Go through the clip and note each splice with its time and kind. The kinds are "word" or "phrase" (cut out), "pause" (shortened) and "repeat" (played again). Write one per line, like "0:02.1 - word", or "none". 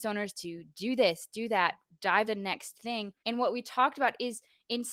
0:02.2 - word
0:03.2 - pause